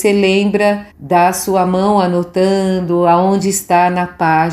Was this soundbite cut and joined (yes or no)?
yes